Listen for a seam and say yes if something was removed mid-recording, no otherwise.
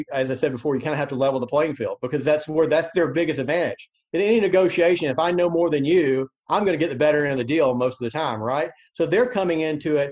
yes